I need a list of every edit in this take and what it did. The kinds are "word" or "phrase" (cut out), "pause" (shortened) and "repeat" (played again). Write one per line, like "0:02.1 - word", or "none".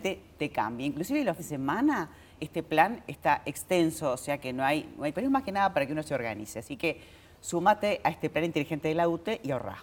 0:01.4 - word
0:02.4 - word
0:05.1 - word